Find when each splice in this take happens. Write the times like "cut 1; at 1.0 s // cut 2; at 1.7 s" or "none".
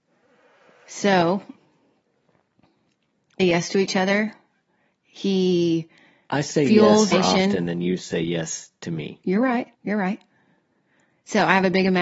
cut 1; at 3.4 s // cut 2; at 7.1 s // cut 3; at 9.7 s